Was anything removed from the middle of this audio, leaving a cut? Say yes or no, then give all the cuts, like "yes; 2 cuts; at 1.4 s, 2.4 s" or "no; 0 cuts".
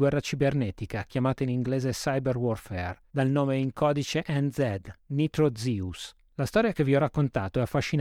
no; 0 cuts